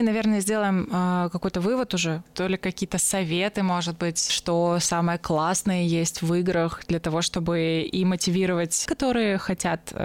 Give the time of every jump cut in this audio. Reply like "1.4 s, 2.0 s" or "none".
8.9 s